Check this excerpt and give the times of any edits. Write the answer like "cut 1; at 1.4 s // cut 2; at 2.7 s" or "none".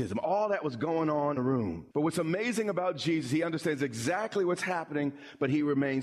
cut 1; at 1.4 s // cut 2; at 1.9 s